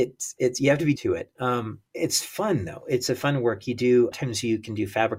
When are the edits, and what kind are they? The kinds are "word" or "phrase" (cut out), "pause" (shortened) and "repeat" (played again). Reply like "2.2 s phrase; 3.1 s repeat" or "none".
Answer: 1.0 s word; 1.9 s pause; 4.1 s phrase